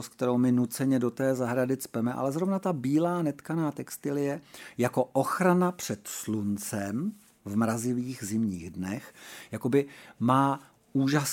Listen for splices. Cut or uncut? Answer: uncut